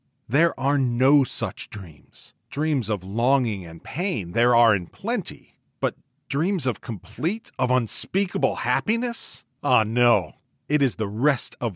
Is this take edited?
yes; 1 cut; at 2.4 s

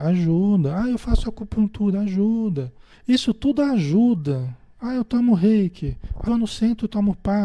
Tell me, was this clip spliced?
yes; 2 cuts; at 2.9 s, 6.3 s

